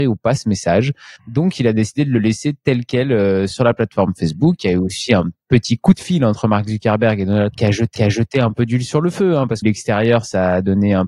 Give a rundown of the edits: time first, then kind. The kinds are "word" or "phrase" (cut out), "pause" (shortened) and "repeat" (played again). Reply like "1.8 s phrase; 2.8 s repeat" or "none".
1.2 s pause; 3.5 s word; 7.5 s word; 8.0 s repeat; 9.6 s phrase